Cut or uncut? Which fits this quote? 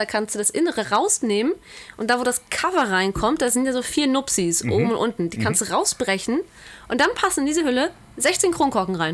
uncut